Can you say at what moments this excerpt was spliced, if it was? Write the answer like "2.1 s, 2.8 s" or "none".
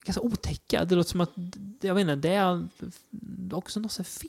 none